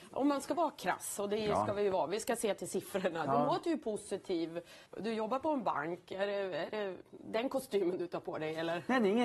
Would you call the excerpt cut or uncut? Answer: cut